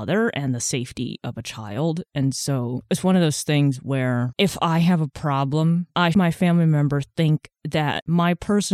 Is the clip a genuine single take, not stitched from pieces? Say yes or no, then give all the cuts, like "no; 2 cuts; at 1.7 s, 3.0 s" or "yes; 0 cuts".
no; 1 cut; at 6.1 s